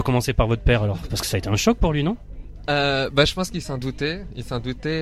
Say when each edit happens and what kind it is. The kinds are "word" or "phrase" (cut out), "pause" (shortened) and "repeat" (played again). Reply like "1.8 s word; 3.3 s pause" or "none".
none